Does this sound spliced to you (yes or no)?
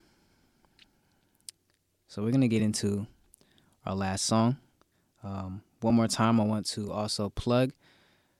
no